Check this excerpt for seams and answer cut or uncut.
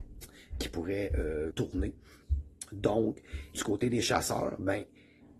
cut